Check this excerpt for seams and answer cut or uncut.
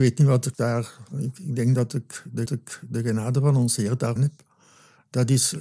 cut